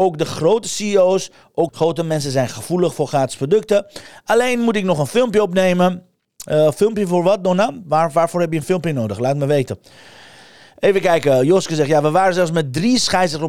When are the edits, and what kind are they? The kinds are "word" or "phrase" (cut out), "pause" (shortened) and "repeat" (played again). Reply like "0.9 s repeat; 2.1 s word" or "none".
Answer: 1.7 s word